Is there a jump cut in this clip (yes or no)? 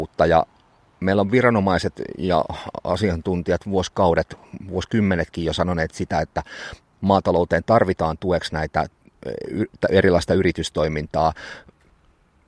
no